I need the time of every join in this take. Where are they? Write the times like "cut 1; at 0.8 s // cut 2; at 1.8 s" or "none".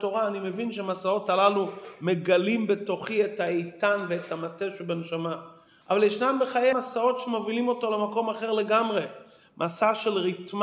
cut 1; at 6.7 s